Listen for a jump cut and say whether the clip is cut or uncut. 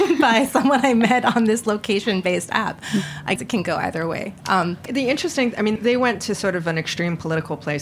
cut